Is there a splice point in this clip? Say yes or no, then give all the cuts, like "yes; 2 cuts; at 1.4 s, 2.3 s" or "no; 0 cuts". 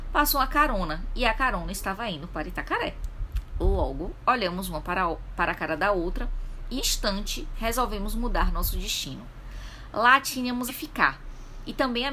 yes; 2 cuts; at 6.8 s, 10.7 s